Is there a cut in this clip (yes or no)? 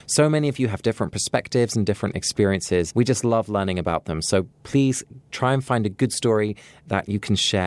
yes